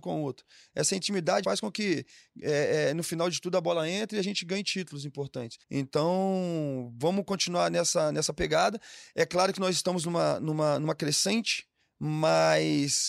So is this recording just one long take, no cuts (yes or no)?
no